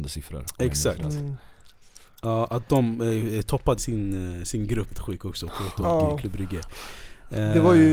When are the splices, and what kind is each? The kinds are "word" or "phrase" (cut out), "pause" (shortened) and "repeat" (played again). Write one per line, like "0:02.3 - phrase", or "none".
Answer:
0:03.8 - word
0:04.9 - word